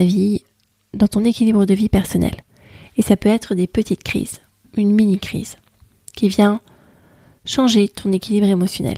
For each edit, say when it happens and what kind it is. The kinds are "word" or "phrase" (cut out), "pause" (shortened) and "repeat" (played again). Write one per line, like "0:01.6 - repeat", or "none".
none